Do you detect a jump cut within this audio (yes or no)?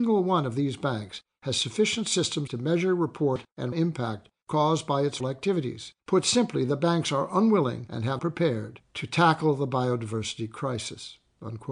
yes